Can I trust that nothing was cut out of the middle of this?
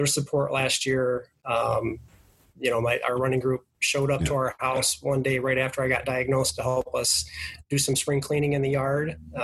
yes; 0 cuts

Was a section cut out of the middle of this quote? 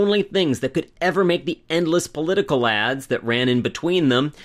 no; 0 cuts

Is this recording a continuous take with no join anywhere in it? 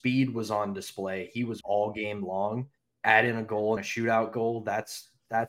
no; 3 cuts; at 1.6 s, 2.8 s, 3.8 s

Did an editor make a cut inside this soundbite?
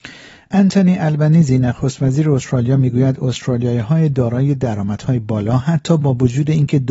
no; 0 cuts

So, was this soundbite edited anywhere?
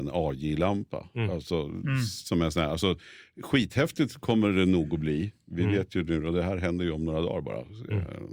no; 0 cuts

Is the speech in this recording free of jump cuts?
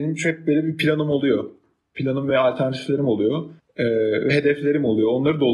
yes; 0 cuts

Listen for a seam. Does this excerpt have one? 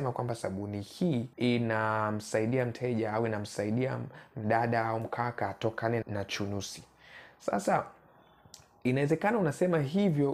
yes; 2 cuts; at 1.3 s, 6.0 s

